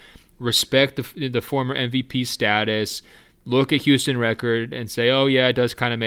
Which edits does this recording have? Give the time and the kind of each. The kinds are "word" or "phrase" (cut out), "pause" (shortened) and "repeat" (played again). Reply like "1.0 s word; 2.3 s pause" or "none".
none